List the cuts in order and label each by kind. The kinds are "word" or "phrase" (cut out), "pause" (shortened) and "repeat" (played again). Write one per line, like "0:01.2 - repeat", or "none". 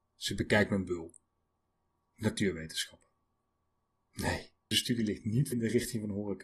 0:04.7 - word
0:05.5 - word